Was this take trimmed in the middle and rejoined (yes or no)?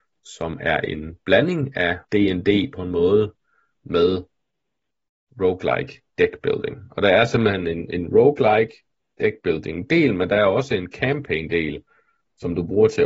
yes